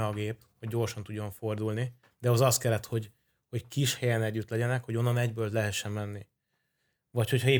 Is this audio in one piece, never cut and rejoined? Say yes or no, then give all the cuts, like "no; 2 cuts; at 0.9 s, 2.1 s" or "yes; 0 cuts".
yes; 0 cuts